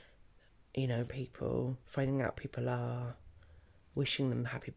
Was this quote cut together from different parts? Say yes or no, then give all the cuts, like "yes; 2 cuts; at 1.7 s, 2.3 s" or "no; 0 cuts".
yes; 3 cuts; at 1.1 s, 1.8 s, 2.3 s